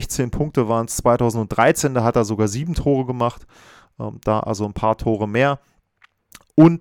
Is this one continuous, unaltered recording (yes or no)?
yes